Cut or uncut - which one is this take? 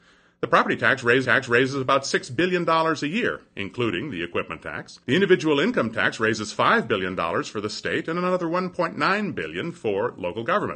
cut